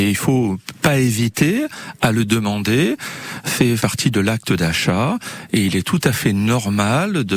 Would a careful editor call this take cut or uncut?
cut